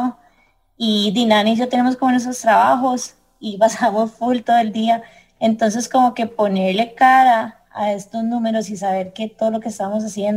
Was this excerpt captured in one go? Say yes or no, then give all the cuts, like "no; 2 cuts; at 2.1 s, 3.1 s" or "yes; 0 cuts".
yes; 0 cuts